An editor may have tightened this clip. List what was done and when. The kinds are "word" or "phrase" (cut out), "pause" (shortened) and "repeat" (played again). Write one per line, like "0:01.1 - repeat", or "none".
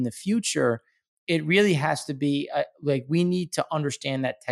none